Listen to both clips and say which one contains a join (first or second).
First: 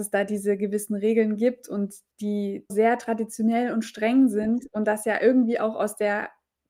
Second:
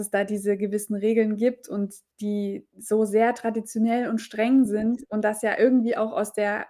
first